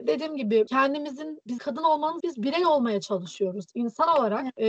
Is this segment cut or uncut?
cut